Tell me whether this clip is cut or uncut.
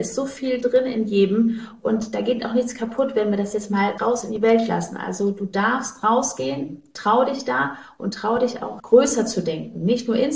cut